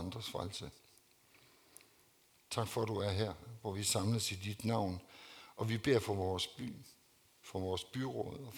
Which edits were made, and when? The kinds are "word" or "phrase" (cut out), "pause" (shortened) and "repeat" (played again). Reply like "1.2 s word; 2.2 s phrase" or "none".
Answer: none